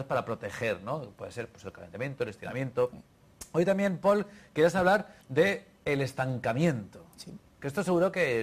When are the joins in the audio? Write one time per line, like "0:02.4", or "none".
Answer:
0:05.2